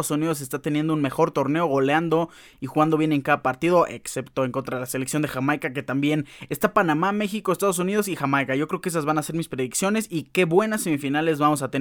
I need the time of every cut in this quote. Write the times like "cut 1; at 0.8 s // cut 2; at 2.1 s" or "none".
none